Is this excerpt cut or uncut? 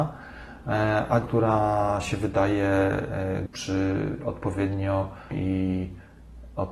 cut